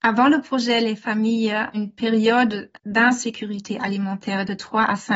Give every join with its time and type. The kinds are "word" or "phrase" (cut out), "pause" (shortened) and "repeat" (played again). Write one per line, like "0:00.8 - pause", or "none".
0:01.7 - word
0:02.7 - pause